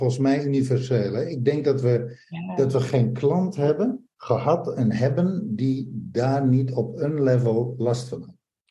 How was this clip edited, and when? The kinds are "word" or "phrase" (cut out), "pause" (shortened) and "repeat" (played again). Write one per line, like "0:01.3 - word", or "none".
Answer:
0:04.1 - pause